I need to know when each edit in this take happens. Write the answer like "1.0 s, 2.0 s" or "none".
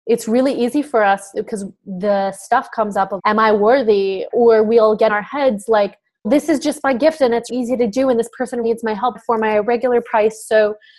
1.3 s, 1.8 s, 3.2 s, 4.3 s, 5.1 s, 6.2 s, 7.5 s, 8.6 s, 9.1 s